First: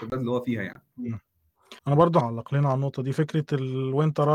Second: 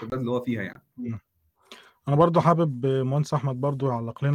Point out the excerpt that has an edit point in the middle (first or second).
first